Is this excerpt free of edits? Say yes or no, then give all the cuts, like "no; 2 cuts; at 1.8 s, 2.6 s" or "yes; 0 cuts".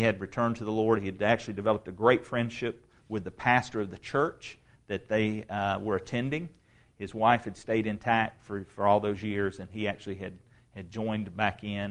yes; 0 cuts